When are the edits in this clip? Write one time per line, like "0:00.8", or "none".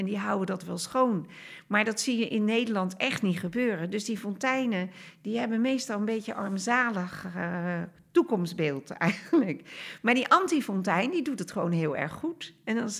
none